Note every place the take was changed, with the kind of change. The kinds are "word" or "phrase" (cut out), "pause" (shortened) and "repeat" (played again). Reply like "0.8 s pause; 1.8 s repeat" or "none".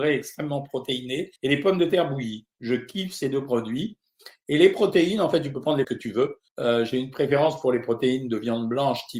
1.4 s pause; 5.8 s word; 6.5 s pause